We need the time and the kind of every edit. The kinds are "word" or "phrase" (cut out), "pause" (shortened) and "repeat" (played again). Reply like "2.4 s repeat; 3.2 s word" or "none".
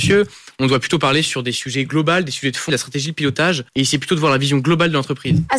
2.7 s word; 3.7 s pause